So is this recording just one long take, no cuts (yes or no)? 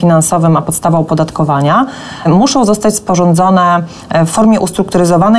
yes